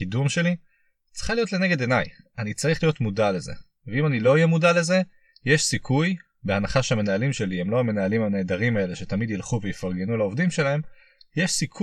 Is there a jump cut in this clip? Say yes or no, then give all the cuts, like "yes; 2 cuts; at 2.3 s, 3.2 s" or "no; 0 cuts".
no; 0 cuts